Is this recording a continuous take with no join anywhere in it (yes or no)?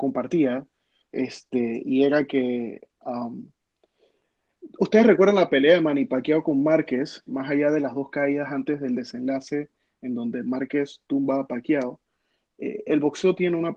no